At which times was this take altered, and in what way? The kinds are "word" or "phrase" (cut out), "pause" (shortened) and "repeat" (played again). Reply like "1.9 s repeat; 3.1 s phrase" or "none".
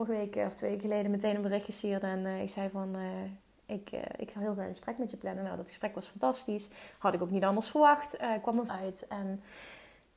8.7 s word